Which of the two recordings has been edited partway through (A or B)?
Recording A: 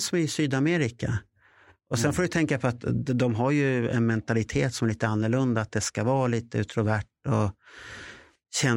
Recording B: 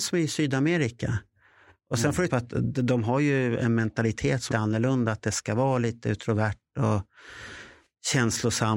B